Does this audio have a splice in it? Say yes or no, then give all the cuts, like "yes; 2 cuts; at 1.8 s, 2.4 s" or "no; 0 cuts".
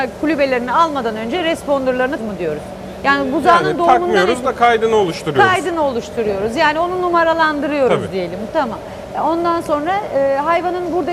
yes; 1 cut; at 2.2 s